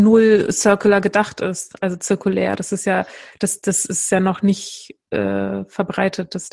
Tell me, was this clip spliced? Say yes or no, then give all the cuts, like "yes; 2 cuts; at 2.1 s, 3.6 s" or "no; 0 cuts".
no; 0 cuts